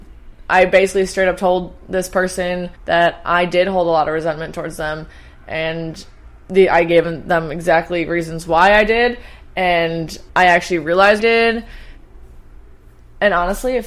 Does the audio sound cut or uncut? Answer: cut